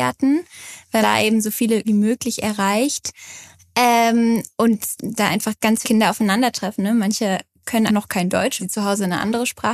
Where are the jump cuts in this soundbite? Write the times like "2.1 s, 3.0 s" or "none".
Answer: 1.0 s, 1.8 s, 5.0 s, 5.8 s, 7.9 s, 8.6 s